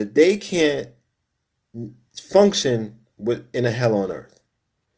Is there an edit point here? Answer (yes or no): no